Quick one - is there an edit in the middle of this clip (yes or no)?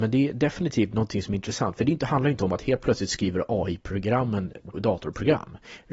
yes